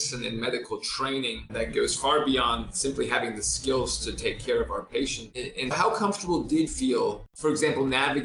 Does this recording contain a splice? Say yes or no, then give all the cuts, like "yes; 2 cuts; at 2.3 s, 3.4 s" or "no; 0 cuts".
yes; 3 cuts; at 1.5 s, 5.7 s, 6.7 s